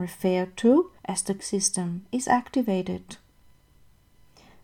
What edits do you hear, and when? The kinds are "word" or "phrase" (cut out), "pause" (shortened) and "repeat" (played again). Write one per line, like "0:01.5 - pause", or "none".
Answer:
0:01.0 - pause
0:01.4 - word